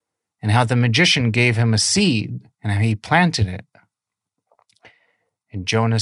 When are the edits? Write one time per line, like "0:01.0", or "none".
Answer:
0:02.5